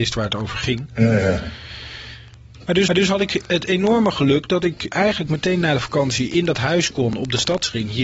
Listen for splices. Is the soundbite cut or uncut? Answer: cut